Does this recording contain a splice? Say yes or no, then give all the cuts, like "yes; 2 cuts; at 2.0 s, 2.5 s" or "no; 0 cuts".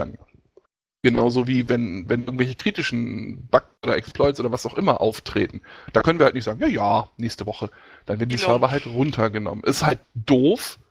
no; 0 cuts